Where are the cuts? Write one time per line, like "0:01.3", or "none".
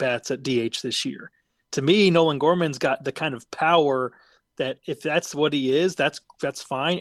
none